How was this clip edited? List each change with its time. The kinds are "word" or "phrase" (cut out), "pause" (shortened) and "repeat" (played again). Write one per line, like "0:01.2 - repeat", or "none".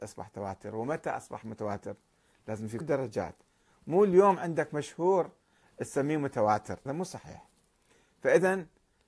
0:02.8 - word
0:06.9 - word